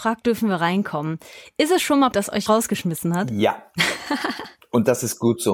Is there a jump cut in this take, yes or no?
yes